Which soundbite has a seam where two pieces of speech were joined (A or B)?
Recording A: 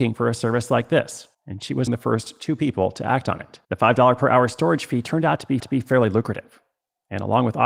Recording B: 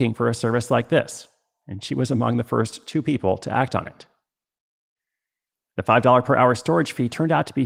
A